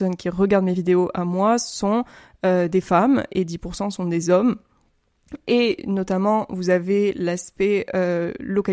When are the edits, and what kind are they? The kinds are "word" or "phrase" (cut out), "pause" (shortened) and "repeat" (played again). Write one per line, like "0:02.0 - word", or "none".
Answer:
none